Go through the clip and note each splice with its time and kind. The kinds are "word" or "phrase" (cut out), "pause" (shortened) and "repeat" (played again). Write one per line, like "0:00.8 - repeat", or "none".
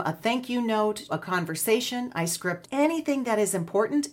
0:01.1 - word
0:02.6 - word